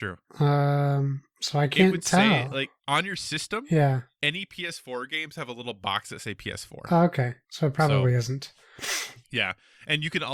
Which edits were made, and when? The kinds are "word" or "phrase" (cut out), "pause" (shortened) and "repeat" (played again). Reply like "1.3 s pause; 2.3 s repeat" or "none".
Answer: none